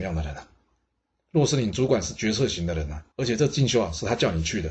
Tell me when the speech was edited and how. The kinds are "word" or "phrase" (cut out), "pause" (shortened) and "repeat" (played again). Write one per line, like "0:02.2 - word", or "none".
0:03.1 - pause